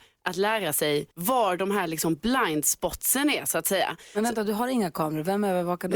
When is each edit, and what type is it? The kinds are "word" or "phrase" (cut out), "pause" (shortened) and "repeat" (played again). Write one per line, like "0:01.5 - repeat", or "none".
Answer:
0:01.1 - pause